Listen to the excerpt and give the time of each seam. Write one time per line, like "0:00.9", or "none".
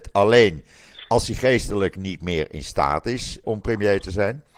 0:03.4